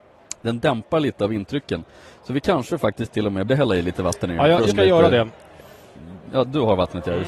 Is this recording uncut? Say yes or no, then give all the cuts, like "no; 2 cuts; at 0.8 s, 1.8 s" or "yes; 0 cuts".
no; 2 cuts; at 3.5 s, 4.7 s